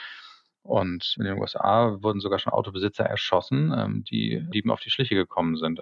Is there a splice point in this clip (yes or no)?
yes